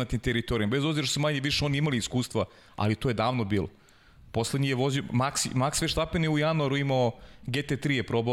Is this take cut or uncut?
uncut